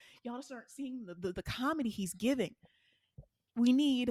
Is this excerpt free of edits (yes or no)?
yes